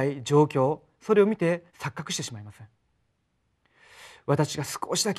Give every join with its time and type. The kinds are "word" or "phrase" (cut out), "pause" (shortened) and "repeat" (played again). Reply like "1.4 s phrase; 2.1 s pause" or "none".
1.7 s pause

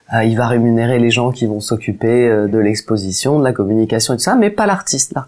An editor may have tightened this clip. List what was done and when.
none

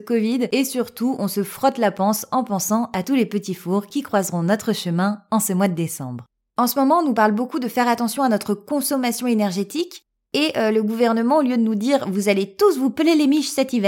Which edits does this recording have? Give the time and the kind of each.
none

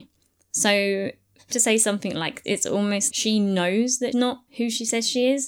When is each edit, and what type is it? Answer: 1.5 s word; 2.4 s word; 3.1 s word; 4.1 s word; 4.5 s pause

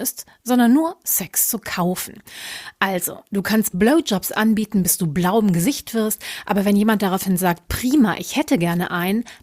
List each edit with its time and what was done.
none

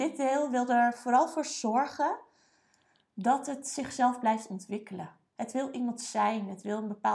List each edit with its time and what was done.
none

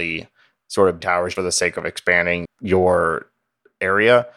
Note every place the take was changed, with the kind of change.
1.0 s word; 1.4 s word; 2.5 s phrase

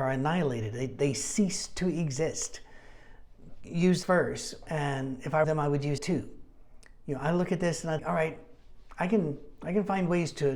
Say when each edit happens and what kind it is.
4.0 s word; 5.4 s phrase; 6.0 s word; 8.0 s word

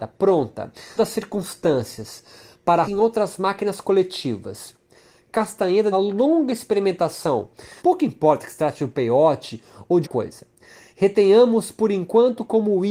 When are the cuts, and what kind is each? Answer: 1.0 s word; 2.8 s word; 5.9 s phrase; 7.8 s pause; 10.0 s word

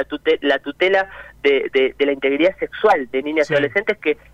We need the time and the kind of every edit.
3.2 s word

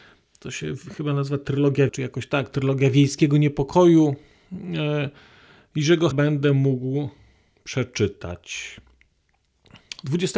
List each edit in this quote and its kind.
1.9 s word; 6.1 s word

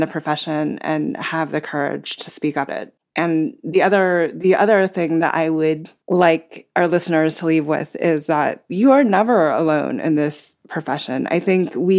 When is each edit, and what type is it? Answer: 2.3 s word; 2.7 s word; 6.0 s pause; 8.7 s word

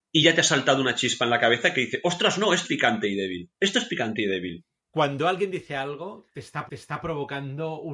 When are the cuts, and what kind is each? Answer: 2.6 s word; 3.5 s pause; 6.7 s repeat

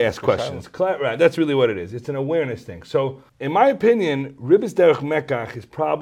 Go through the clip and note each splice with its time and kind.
3.3 s pause

